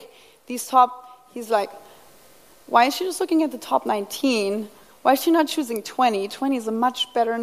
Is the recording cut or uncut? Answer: uncut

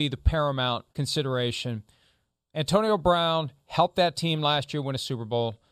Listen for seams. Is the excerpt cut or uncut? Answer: cut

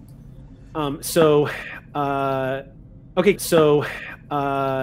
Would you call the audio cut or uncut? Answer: cut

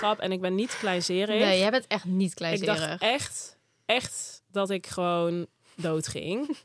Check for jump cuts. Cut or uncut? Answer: uncut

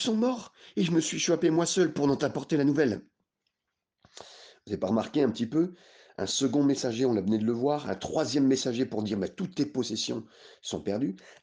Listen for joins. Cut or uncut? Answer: uncut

